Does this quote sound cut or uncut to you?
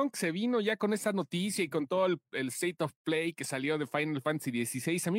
uncut